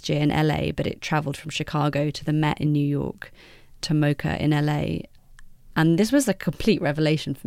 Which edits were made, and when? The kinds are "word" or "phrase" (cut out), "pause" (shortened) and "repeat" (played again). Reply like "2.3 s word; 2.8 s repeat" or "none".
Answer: none